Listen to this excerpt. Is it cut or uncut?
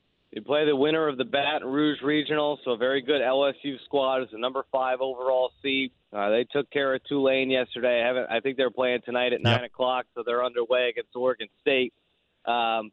cut